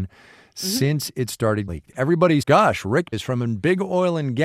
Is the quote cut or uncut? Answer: cut